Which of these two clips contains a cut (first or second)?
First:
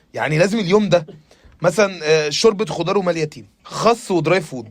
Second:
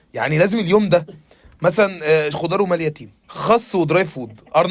second